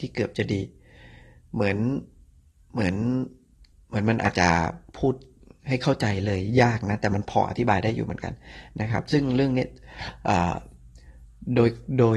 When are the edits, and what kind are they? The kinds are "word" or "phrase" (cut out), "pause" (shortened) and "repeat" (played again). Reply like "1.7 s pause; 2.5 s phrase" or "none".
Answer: 3.7 s pause